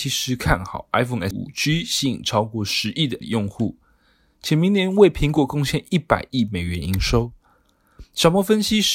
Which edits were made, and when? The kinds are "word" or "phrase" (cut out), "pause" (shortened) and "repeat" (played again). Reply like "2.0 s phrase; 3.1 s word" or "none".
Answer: 1.3 s word; 3.2 s word